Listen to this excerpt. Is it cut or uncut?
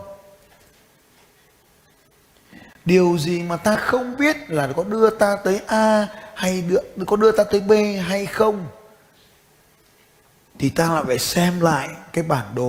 uncut